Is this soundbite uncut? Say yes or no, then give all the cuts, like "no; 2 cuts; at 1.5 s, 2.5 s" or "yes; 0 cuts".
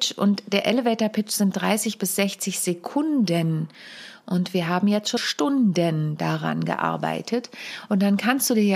no; 1 cut; at 5.2 s